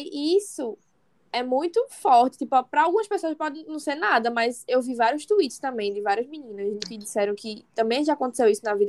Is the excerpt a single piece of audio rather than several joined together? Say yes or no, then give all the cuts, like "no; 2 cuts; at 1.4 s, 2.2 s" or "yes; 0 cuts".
no; 1 cut; at 6.8 s